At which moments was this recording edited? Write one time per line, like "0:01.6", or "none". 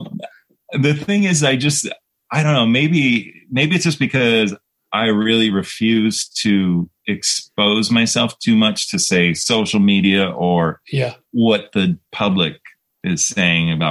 0:11.2